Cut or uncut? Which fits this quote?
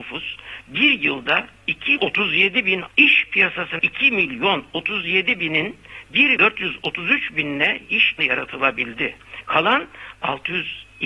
cut